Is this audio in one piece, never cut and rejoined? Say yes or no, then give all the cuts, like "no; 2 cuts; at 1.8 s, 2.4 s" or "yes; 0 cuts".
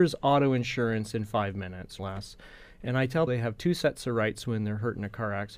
no; 2 cuts; at 2.0 s, 3.3 s